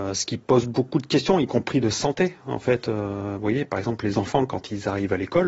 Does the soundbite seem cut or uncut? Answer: uncut